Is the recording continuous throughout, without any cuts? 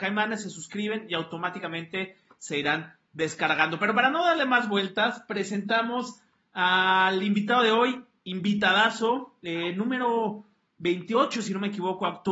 yes; 0 cuts

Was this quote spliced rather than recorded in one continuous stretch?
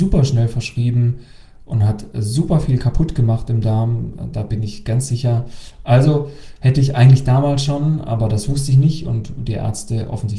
no; 0 cuts

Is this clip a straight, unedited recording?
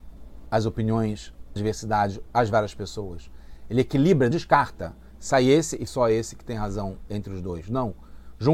no; 4 cuts; at 1.6 s, 2.3 s, 4.3 s, 5.9 s

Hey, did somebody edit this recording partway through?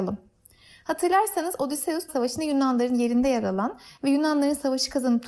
yes; 1 cut; at 2.1 s

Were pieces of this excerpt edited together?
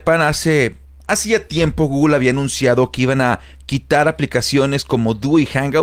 no; 0 cuts

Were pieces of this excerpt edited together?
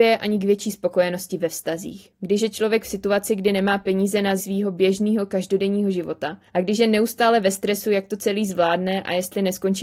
yes; 3 cuts; at 2.1 s, 4.4 s, 6.5 s

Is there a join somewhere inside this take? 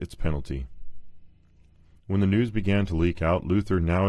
no; 0 cuts

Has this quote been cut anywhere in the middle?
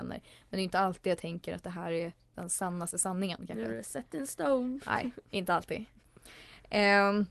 no; 0 cuts

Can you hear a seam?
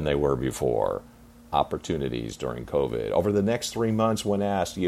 no; 0 cuts

